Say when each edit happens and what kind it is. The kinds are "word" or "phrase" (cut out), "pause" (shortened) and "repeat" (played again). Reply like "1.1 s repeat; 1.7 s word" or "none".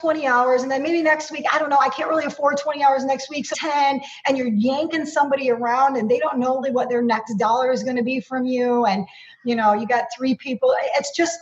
3.5 s word; 6.6 s word